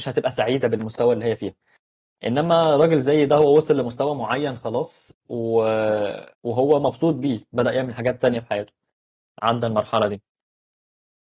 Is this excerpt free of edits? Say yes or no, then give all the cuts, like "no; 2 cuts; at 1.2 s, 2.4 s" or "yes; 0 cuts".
no; 1 cut; at 6.3 s